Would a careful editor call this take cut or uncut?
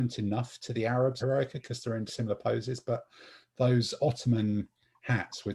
cut